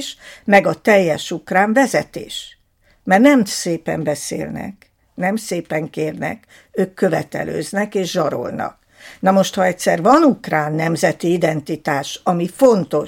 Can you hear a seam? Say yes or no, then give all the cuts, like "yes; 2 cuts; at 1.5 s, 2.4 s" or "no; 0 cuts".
no; 0 cuts